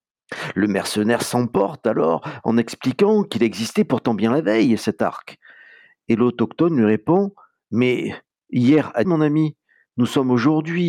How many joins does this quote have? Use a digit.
1